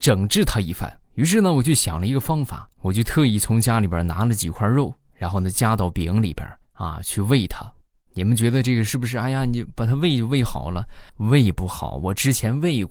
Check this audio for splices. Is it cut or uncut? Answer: cut